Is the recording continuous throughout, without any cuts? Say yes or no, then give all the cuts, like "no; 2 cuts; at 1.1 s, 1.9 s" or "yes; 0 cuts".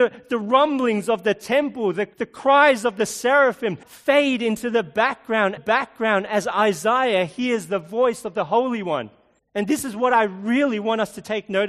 no; 4 cuts; at 2.1 s, 3.8 s, 5.6 s, 9.4 s